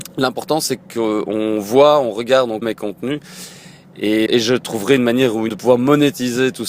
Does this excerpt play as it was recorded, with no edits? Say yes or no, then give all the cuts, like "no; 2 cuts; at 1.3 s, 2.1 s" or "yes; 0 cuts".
no; 3 cuts; at 2.6 s, 4.3 s, 5.5 s